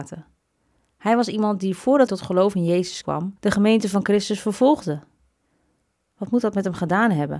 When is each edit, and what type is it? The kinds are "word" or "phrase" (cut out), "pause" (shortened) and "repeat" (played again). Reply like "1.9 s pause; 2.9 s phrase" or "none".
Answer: 2.1 s word; 3.0 s word; 3.4 s pause